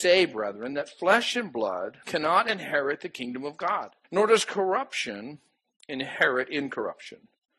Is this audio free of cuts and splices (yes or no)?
no